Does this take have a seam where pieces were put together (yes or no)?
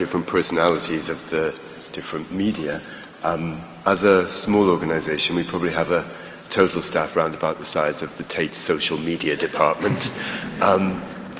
no